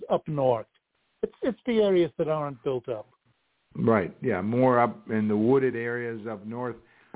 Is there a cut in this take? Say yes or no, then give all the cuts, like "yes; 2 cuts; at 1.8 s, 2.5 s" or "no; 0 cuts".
no; 0 cuts